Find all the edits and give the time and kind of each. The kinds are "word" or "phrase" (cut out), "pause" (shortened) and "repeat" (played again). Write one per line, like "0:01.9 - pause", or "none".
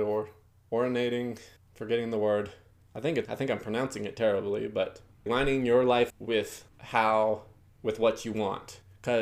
0:03.3 - word
0:05.3 - word
0:06.1 - word

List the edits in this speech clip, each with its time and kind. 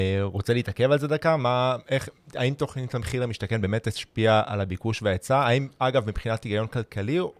none

